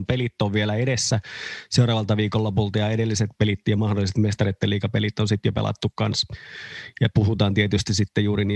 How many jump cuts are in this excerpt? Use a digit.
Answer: 0